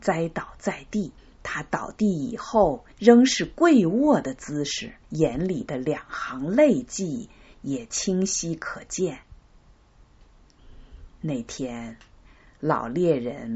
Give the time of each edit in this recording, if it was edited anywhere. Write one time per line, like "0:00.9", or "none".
0:01.2
0:02.9
0:05.0